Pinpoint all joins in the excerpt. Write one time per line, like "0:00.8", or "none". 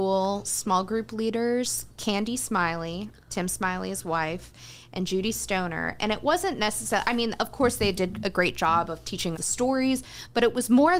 0:09.3